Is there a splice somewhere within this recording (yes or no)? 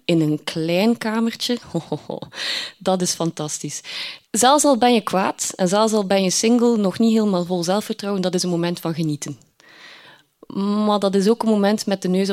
yes